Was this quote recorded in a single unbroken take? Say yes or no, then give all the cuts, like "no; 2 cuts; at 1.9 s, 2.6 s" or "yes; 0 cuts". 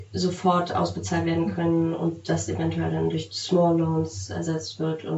yes; 0 cuts